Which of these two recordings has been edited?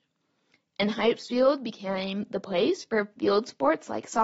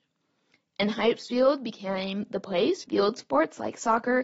second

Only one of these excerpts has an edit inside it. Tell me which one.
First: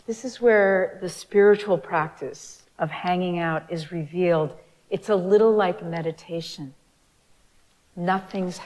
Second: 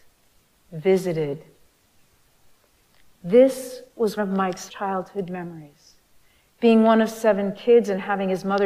second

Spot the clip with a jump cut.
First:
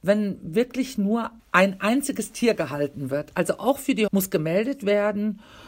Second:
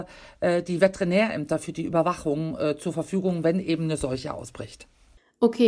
first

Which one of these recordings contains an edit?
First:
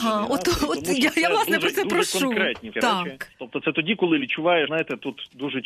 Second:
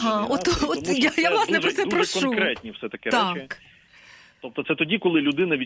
first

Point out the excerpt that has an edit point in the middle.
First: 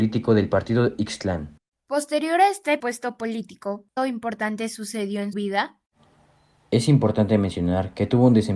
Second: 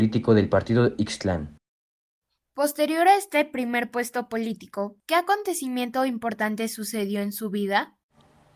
first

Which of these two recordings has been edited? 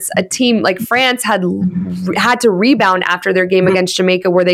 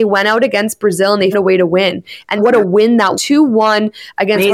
second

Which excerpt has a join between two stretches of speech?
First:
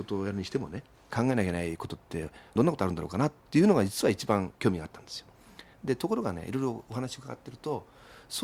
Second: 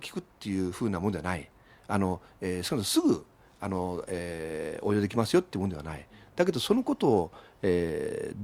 first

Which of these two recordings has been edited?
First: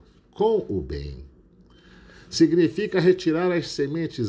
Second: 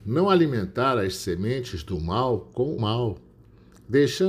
second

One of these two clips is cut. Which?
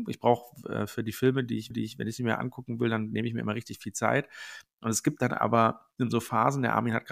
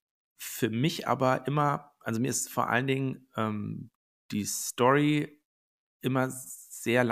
first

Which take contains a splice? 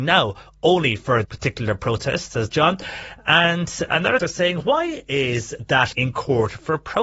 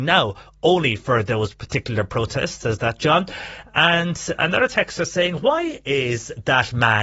first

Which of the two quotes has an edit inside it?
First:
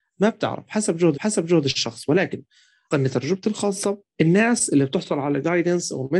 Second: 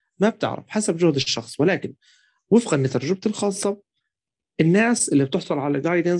first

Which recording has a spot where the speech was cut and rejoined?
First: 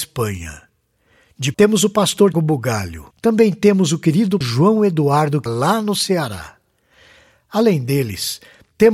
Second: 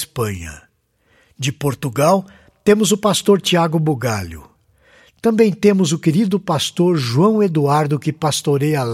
first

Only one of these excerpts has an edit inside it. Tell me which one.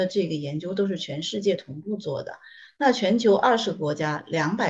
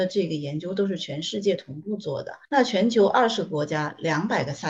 second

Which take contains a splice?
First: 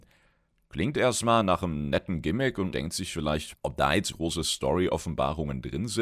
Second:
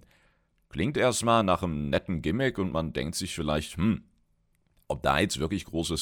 first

